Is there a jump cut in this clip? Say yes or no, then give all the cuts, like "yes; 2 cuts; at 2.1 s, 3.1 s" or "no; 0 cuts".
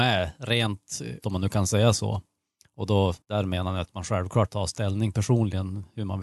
yes; 3 cuts; at 1.2 s, 3.2 s, 4.5 s